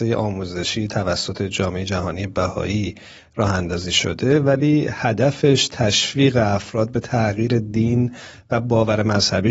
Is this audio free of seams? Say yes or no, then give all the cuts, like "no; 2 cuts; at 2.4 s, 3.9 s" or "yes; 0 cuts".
yes; 0 cuts